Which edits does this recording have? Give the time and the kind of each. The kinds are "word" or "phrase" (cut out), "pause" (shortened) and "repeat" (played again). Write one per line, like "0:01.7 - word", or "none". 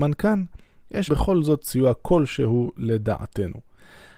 0:01.1 - word